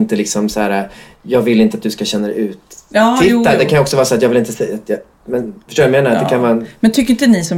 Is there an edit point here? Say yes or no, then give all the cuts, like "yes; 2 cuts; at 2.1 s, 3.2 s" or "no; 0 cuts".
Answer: no; 0 cuts